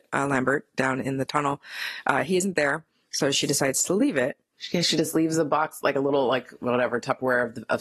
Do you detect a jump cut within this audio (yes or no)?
no